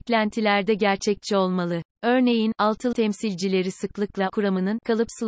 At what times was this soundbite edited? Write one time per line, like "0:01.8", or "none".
0:02.9
0:04.3